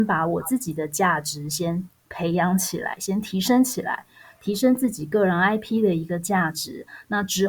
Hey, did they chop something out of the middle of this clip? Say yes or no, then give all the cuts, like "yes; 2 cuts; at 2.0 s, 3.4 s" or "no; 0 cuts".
no; 0 cuts